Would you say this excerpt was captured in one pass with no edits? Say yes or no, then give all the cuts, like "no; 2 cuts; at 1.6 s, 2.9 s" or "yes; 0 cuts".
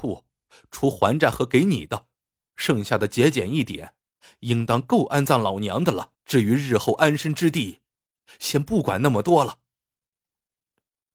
no; 1 cut; at 6.1 s